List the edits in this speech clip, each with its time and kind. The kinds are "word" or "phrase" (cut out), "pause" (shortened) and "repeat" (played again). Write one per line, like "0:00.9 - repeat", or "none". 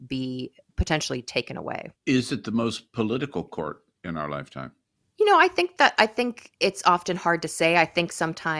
0:02.0 - pause
0:05.0 - pause
0:06.6 - pause

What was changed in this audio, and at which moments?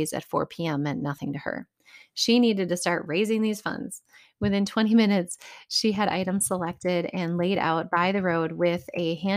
none

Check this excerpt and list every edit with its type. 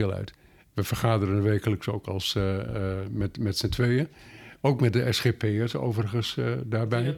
none

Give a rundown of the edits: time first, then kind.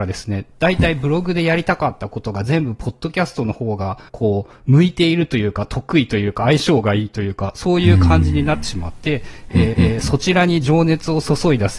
0:04.1 - pause
0:09.7 - repeat

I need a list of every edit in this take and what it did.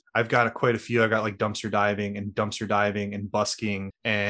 0:02.3 - repeat

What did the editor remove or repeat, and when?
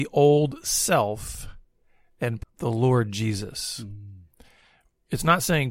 0:02.4 - phrase

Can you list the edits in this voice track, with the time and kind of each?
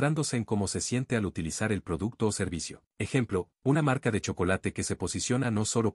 0:02.9 - pause

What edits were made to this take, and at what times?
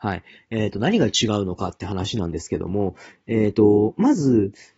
none

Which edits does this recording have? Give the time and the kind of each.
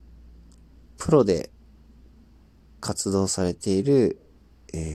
none

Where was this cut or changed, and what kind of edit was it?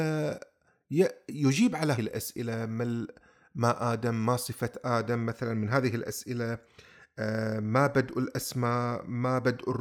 0:01.9 - word

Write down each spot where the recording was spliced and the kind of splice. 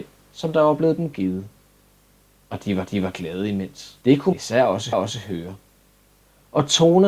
0:02.9 - repeat
0:04.0 - pause
0:04.3 - phrase
0:04.9 - repeat

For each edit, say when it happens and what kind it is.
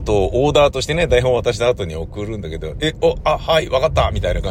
none

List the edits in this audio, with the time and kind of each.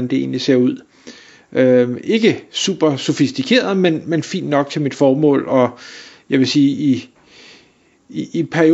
none

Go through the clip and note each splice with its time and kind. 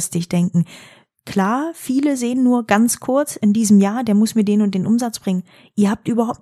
none

